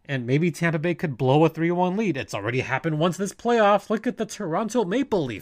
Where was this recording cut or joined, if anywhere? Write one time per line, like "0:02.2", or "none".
none